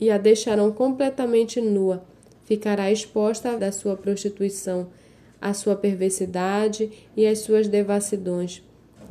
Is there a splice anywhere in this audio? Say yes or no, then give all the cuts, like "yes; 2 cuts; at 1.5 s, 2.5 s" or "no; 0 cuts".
yes; 1 cut; at 3.6 s